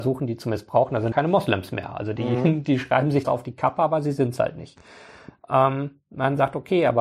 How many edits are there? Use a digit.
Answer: 2